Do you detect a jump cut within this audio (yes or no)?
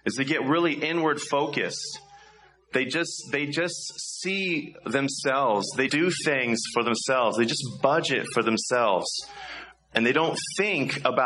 yes